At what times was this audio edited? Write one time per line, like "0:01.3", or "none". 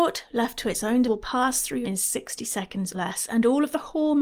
0:01.0
0:01.8
0:02.9